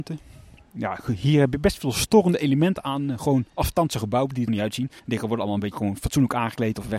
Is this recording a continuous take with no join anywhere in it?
no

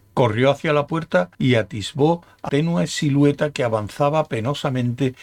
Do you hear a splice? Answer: yes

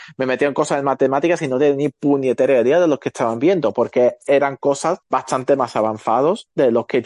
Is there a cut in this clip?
yes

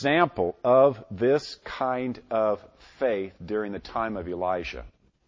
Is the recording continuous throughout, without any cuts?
yes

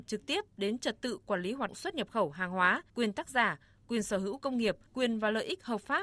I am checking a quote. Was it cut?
yes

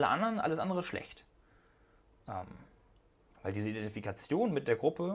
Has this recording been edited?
no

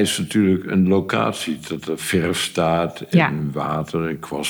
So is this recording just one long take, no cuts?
yes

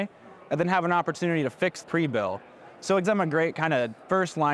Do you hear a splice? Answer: yes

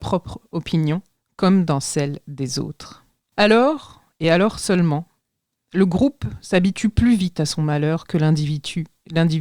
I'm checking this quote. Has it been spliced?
no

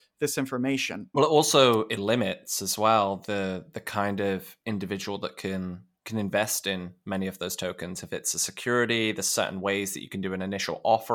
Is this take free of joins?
no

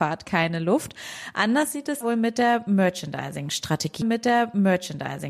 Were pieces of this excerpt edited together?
yes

